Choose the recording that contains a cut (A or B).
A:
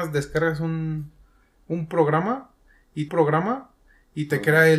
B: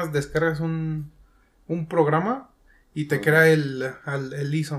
A